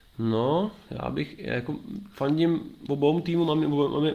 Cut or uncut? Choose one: uncut